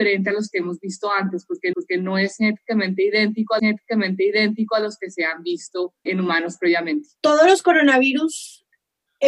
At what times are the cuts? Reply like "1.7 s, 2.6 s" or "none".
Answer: 1.7 s, 3.6 s, 6.1 s, 7.2 s